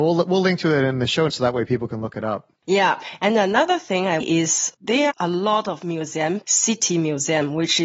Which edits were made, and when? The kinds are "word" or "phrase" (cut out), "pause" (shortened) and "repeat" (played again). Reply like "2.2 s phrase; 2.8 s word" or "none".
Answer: 1.3 s word; 2.6 s pause; 4.2 s phrase; 5.1 s word; 6.4 s phrase